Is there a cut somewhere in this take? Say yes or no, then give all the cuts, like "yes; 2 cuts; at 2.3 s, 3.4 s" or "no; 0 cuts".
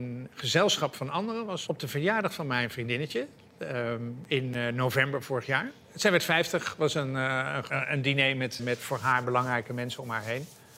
yes; 1 cut; at 8.6 s